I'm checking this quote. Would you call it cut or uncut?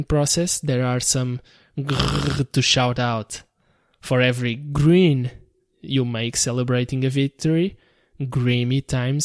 uncut